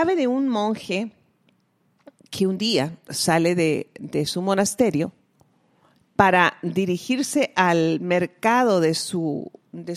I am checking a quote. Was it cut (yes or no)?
no